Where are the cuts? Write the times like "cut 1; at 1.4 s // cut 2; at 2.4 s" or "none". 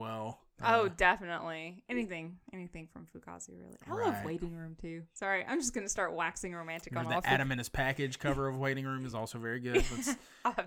none